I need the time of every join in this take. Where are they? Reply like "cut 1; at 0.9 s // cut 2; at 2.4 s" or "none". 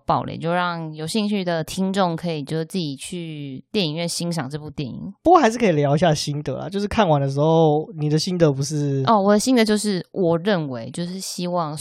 cut 1; at 5.2 s